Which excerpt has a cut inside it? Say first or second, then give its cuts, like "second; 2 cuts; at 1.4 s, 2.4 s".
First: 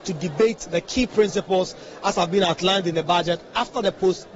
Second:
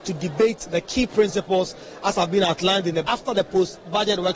second; 1 cut; at 3.0 s